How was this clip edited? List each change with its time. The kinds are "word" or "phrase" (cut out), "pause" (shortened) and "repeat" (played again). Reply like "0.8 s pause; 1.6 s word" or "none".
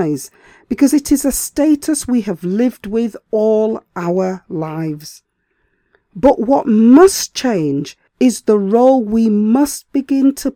8.1 s pause